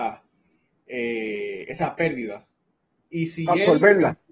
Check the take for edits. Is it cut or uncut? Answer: cut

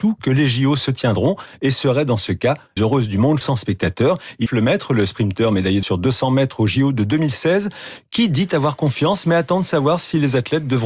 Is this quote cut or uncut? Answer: cut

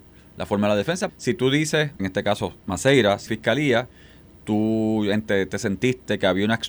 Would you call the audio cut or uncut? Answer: cut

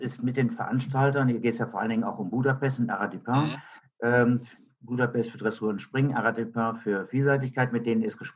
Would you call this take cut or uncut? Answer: uncut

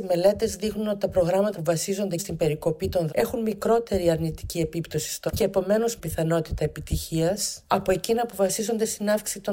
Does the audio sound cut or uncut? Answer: cut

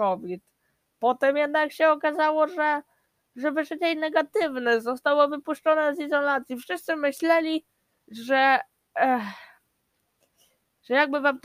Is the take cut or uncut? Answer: uncut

